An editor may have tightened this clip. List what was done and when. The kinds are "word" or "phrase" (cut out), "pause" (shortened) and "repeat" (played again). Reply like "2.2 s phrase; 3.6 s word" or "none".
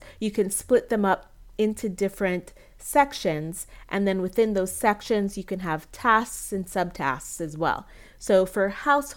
none